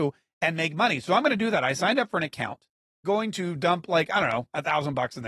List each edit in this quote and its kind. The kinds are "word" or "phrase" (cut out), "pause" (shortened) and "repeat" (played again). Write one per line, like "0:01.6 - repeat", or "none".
0:03.0 - phrase